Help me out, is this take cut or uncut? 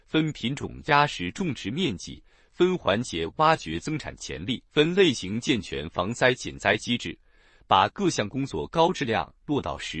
cut